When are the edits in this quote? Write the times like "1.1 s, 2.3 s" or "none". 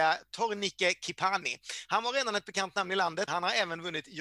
3.3 s